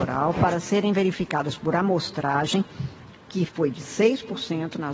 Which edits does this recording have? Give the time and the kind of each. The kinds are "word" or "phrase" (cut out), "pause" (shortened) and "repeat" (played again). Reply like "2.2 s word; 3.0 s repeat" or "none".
none